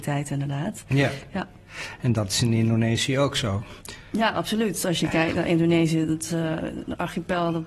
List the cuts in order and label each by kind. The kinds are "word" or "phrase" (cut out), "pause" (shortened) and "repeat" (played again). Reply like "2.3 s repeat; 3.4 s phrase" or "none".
none